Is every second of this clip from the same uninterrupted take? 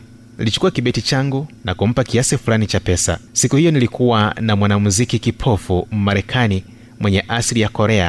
no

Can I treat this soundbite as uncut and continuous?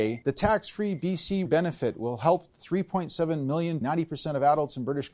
no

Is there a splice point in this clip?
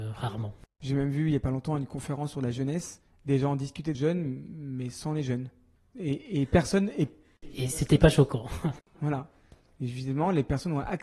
yes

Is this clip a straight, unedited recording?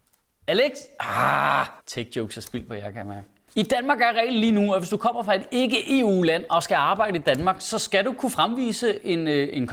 no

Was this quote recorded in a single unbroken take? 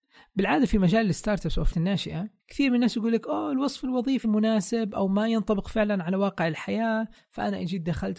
no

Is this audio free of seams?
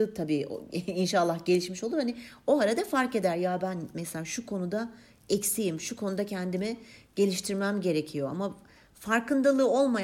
yes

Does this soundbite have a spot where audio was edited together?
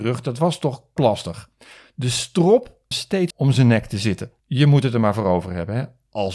yes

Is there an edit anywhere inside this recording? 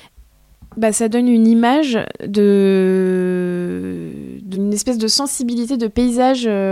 yes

